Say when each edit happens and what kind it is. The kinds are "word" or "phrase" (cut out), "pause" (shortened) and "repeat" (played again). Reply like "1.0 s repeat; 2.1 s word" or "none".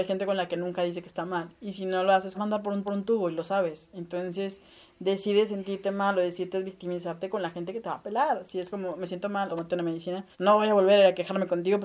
2.3 s phrase; 2.9 s repeat; 9.5 s phrase; 10.3 s pause